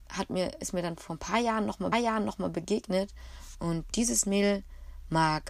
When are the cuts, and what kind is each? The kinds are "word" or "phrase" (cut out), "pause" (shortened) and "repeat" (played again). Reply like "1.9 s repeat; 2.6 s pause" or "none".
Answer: 1.9 s repeat